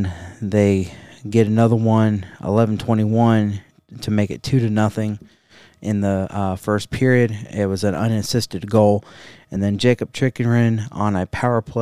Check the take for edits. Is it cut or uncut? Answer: uncut